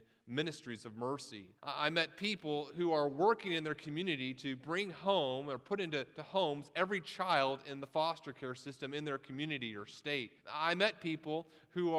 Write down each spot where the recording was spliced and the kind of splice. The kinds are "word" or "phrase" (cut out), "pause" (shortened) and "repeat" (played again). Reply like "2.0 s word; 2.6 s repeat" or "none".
1.6 s pause; 10.4 s pause